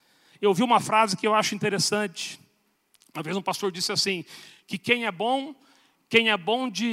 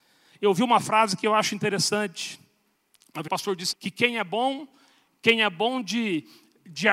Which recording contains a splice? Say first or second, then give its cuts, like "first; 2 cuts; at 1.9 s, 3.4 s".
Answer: second; 2 cuts; at 3.3 s, 3.7 s